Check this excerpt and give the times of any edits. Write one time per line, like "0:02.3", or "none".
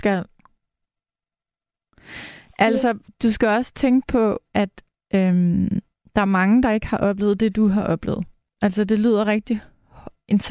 none